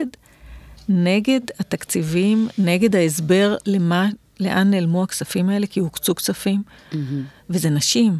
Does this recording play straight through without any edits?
yes; 0 cuts

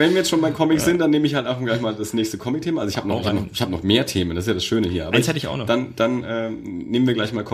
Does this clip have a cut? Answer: no; 0 cuts

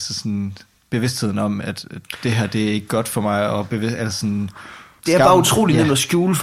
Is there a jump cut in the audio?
no; 0 cuts

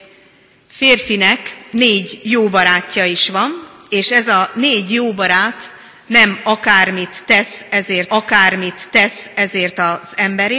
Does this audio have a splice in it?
yes; 1 cut; at 8.1 s

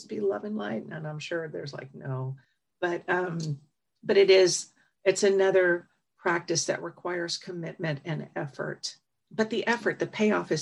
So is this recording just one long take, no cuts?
yes; 0 cuts

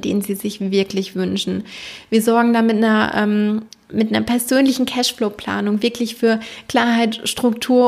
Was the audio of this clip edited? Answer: no; 0 cuts

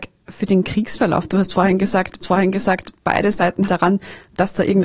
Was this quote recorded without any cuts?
no; 2 cuts; at 2.2 s, 3.7 s

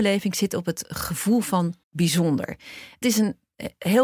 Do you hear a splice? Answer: yes; 2 cuts; at 1.8 s, 3.0 s

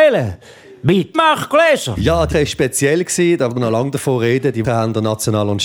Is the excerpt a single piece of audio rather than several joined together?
no; 4 cuts; at 1.1 s, 2.3 s, 3.5 s, 4.6 s

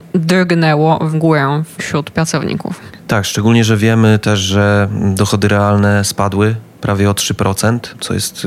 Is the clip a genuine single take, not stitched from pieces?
yes; 0 cuts

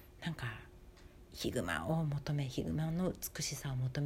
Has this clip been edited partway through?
yes; 1 cut; at 1.3 s

